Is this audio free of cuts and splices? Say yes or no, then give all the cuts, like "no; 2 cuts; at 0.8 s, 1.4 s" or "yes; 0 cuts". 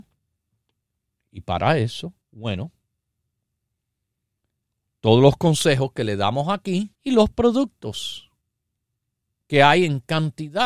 no; 2 cuts; at 2.2 s, 6.9 s